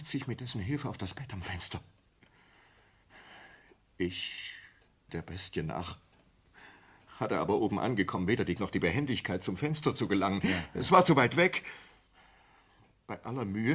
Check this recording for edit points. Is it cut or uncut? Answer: cut